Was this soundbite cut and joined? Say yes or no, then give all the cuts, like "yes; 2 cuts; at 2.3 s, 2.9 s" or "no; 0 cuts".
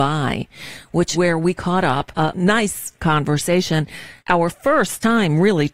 yes; 4 cuts; at 1.1 s, 2.1 s, 3.0 s, 4.2 s